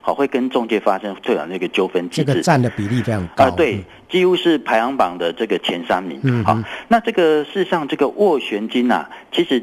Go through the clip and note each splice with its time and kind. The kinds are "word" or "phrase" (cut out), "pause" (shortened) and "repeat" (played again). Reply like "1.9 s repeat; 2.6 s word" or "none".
none

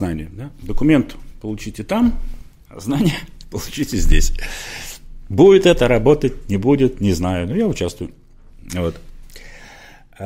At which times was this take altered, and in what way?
none

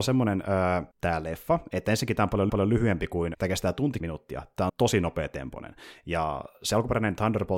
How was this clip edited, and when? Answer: 0.9 s pause; 2.5 s repeat; 3.3 s phrase; 4.0 s word; 4.7 s word

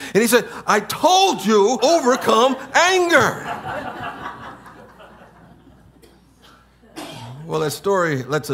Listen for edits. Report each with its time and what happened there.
1.8 s word

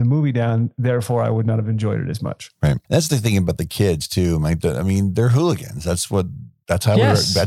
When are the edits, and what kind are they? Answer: 2.8 s pause

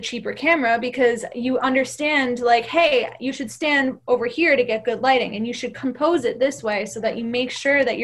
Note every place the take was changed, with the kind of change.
none

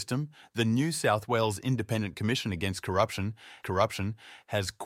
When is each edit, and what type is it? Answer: 3.6 s repeat

